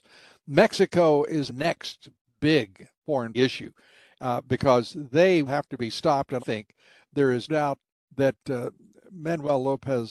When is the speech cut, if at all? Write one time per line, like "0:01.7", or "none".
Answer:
0:01.5
0:02.2
0:03.3
0:05.5
0:06.4
0:07.5